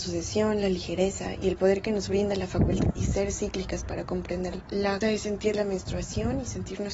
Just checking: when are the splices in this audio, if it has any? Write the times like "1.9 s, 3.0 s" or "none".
2.9 s, 5.0 s